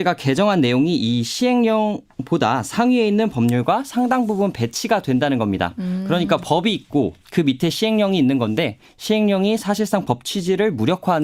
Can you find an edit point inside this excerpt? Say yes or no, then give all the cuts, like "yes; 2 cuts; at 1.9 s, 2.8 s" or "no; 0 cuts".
yes; 1 cut; at 7.2 s